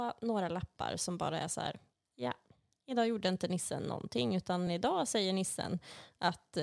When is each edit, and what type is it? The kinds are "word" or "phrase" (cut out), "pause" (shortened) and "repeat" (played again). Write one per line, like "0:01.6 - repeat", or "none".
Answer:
none